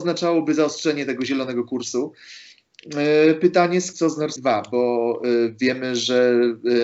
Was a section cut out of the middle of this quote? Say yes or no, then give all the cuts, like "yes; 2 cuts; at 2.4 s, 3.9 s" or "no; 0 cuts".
yes; 2 cuts; at 3.9 s, 4.4 s